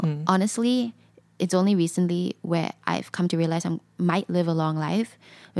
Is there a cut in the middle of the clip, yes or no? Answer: no